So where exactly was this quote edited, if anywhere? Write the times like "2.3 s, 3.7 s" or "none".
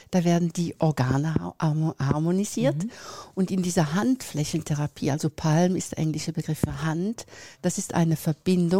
7.5 s

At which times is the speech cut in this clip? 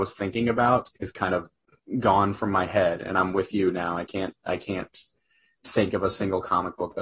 none

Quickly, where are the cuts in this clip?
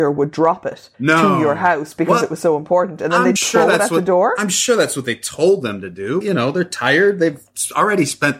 0.9 s, 3.4 s, 6.2 s

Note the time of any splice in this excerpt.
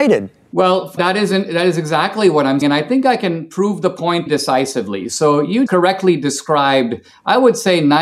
1.0 s, 2.6 s, 4.3 s, 5.7 s

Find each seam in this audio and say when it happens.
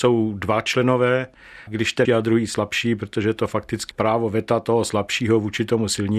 1.7 s, 2.0 s, 3.9 s

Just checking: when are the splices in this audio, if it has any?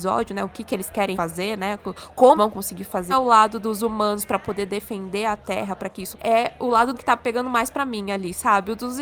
1.1 s, 2.4 s, 3.1 s, 6.1 s, 6.9 s

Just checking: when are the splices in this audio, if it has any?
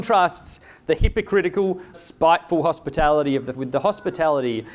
1.9 s, 3.5 s

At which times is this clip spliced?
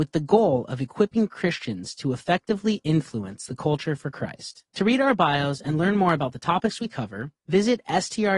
4.7 s, 7.4 s

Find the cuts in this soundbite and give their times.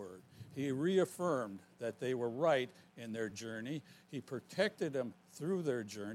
none

